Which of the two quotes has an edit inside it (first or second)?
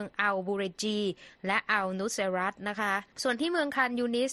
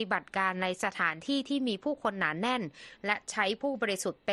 first